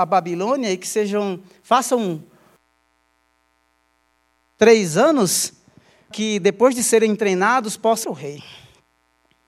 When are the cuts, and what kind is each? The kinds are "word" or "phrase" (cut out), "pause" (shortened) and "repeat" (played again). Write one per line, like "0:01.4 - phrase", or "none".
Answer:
0:06.1 - word
0:08.0 - word